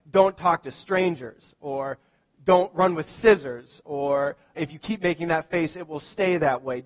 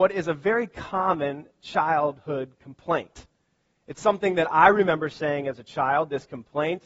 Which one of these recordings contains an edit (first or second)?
first